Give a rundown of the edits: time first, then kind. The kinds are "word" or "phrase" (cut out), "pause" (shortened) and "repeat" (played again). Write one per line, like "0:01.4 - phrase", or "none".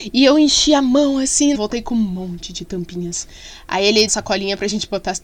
0:01.5 - phrase
0:04.1 - phrase